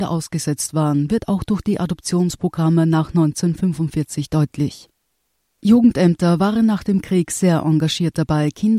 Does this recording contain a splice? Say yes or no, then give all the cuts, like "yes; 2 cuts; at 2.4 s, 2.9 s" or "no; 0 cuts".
no; 0 cuts